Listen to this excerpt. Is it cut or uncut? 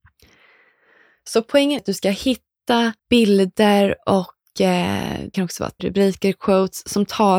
cut